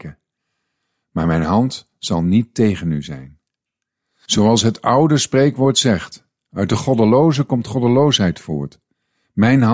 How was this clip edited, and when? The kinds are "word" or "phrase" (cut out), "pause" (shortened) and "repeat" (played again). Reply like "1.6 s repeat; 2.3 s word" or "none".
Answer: none